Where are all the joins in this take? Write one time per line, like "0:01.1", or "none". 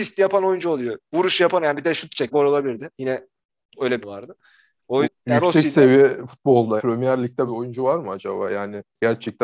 0:02.3
0:04.0
0:05.0
0:06.8
0:07.5